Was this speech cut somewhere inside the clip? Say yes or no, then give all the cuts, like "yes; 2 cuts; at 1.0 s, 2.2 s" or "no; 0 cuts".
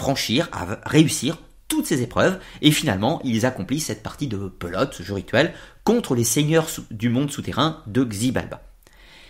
no; 0 cuts